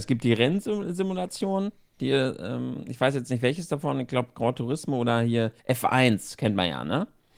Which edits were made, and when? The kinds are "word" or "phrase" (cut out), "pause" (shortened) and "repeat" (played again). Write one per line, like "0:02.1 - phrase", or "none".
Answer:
0:05.6 - pause